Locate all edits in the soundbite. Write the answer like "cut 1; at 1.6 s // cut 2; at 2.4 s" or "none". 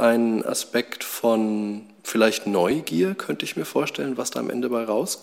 none